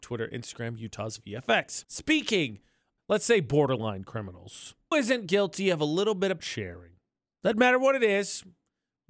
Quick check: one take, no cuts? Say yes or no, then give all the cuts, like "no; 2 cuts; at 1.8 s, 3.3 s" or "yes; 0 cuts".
no; 3 cuts; at 3.0 s, 4.9 s, 6.4 s